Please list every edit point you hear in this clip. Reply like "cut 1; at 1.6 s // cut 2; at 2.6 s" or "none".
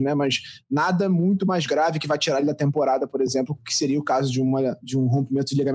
none